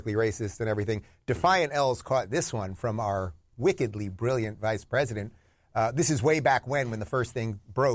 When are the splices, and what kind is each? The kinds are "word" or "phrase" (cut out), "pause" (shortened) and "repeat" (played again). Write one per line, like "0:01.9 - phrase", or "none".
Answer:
none